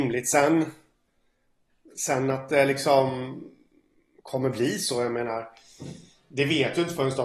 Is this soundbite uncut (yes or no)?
yes